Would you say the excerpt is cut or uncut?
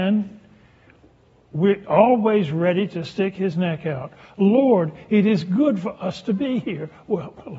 uncut